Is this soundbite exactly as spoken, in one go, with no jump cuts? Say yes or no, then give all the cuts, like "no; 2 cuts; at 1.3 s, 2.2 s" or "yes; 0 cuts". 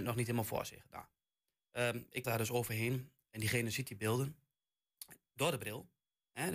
no; 1 cut; at 2.2 s